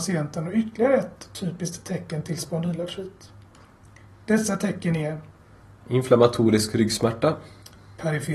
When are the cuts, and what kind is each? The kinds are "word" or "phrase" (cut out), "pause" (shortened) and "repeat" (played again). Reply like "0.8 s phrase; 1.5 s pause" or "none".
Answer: none